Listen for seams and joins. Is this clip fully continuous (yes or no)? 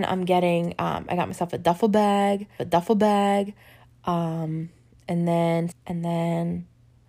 no